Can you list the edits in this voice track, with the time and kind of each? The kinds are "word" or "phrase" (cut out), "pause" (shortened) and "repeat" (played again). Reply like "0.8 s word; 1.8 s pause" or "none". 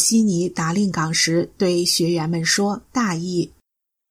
2.9 s pause